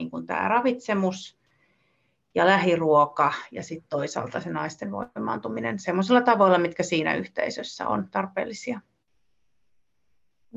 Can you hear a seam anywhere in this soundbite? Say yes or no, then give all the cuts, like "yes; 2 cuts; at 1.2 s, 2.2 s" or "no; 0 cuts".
no; 0 cuts